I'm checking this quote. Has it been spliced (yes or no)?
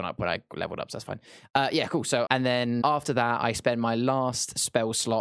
yes